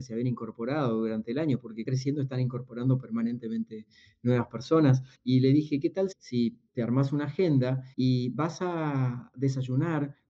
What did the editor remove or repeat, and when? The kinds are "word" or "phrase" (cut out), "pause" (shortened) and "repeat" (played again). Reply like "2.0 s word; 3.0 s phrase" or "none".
1.9 s phrase; 5.1 s pause; 6.1 s word; 6.7 s pause; 7.9 s pause